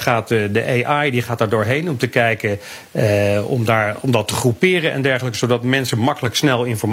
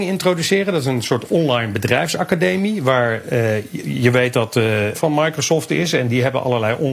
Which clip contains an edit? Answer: second; 1 cut; at 4.9 s

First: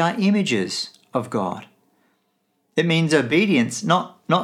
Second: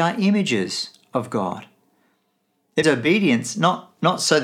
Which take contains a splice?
second; 1 cut; at 2.8 s

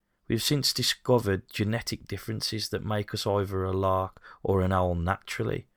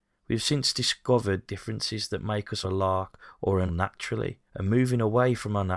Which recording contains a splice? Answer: second; 4 cuts; at 1.5 s, 2.6 s, 3.7 s, 4.5 s

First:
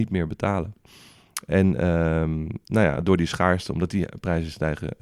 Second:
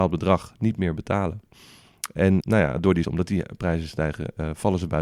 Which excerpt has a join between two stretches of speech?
second; 2 cuts; at 2.4 s, 3.0 s

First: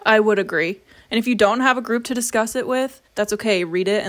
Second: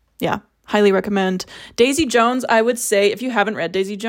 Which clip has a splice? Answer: first; 1 cut; at 3.1 s

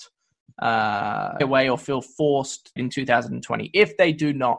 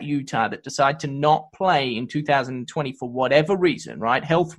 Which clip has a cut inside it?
first; 2 cuts; at 1.4 s, 2.8 s

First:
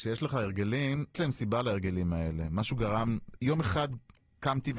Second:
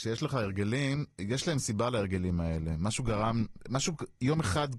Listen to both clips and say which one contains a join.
first; 2 cuts; at 1.1 s, 3.4 s

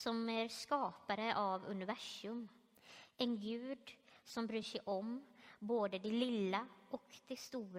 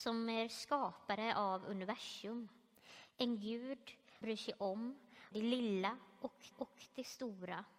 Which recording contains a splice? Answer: second; 3 cuts; at 4.2 s, 5.3 s, 6.5 s

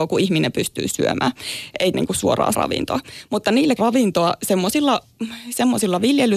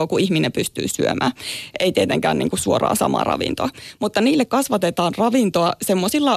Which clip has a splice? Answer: first; 3 cuts; at 1.9 s, 2.5 s, 3.8 s

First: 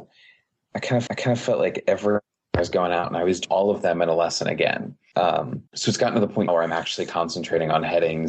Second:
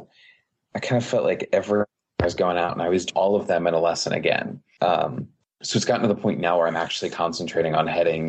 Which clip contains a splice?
first; 3 cuts; at 1.1 s, 5.7 s, 6.5 s

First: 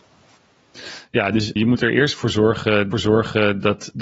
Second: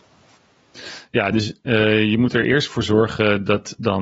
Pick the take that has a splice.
first; 2 cuts; at 1.6 s, 2.9 s

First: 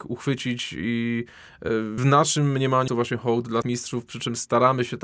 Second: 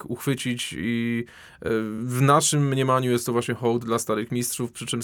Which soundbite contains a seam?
first; 3 cuts; at 2.0 s, 2.9 s, 3.6 s

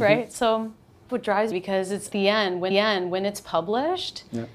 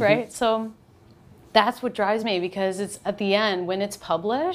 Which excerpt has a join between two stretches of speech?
first; 4 cuts; at 1.1 s, 1.5 s, 2.1 s, 2.7 s

